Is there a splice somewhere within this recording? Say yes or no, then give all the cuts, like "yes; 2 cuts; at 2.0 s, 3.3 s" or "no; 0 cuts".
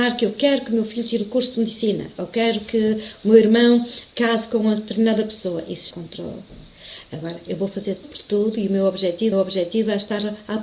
yes; 3 cuts; at 5.9 s, 8.0 s, 9.3 s